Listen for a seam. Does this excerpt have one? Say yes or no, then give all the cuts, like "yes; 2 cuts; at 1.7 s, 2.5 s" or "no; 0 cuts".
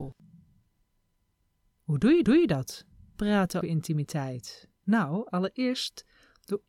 yes; 3 cuts; at 2.2 s, 3.6 s, 4.7 s